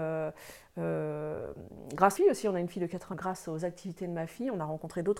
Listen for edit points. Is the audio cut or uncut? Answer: cut